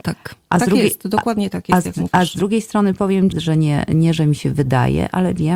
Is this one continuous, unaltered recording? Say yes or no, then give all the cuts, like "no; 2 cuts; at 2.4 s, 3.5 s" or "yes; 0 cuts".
no; 1 cut; at 3.3 s